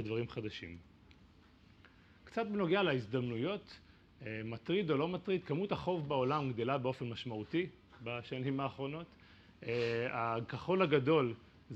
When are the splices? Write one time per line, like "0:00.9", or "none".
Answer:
none